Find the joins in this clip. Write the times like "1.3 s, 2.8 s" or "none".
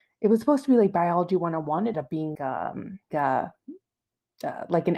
1.9 s, 2.3 s, 3.1 s